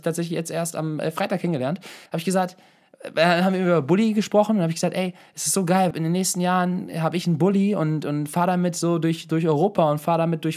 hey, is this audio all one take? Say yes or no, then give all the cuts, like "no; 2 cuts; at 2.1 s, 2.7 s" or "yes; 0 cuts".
no; 2 cuts; at 2.1 s, 5.9 s